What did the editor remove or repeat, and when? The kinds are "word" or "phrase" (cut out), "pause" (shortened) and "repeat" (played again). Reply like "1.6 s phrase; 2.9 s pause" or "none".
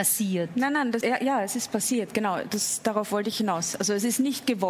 1.0 s word; 3.3 s word